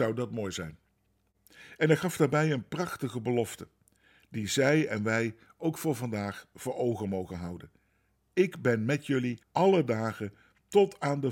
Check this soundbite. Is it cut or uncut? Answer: cut